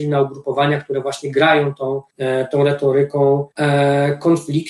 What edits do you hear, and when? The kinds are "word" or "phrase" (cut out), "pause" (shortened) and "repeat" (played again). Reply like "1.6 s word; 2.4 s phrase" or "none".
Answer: 2.1 s pause; 3.5 s pause